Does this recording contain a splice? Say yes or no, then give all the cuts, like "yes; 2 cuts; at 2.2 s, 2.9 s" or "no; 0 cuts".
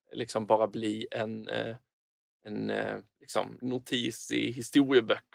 no; 0 cuts